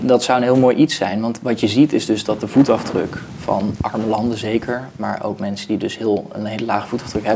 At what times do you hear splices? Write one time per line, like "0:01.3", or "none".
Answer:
none